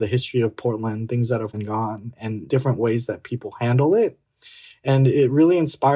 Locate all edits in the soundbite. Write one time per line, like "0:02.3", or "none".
0:01.5
0:02.5